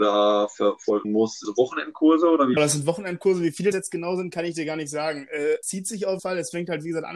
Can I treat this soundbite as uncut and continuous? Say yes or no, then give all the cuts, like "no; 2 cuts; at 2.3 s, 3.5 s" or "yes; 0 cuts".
no; 6 cuts; at 1.0 s, 1.4 s, 2.6 s, 3.7 s, 5.6 s, 6.2 s